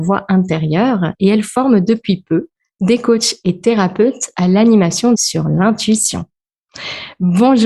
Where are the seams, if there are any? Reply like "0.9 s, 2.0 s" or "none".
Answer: 5.1 s

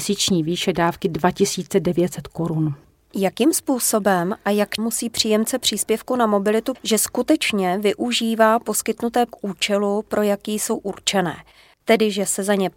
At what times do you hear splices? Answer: 4.8 s, 6.7 s, 9.3 s

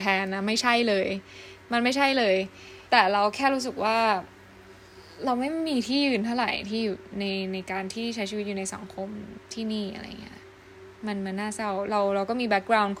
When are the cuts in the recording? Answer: 2.9 s

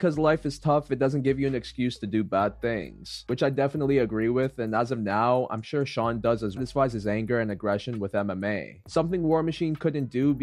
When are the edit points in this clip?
6.6 s

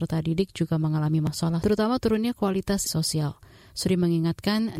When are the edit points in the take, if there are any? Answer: 1.6 s, 2.9 s

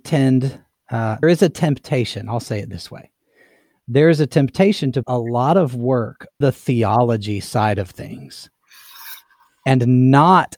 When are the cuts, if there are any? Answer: 1.2 s, 5.0 s, 6.4 s

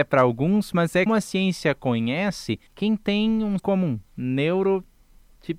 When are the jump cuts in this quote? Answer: 1.1 s, 2.7 s, 3.6 s, 4.1 s

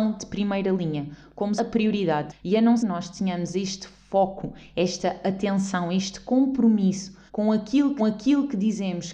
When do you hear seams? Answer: 1.6 s, 2.8 s, 7.3 s, 8.0 s

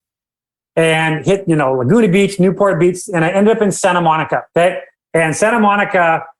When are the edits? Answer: 4.5 s, 4.9 s

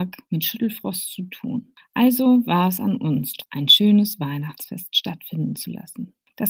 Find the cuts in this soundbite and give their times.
none

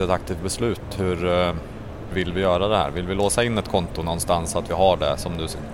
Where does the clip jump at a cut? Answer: 2.1 s

